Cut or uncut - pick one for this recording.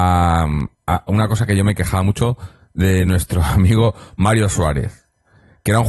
uncut